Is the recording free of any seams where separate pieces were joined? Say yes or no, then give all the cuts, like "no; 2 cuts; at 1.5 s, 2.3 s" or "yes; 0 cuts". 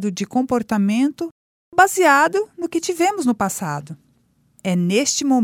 yes; 0 cuts